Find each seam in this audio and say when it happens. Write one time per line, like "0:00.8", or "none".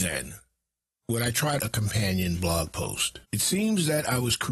0:01.6
0:03.2